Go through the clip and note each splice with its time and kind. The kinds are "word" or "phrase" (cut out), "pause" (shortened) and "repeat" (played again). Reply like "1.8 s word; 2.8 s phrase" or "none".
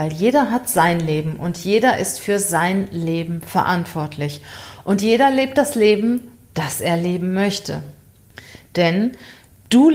none